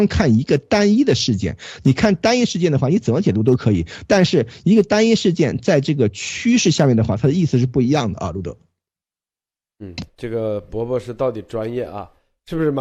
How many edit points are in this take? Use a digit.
1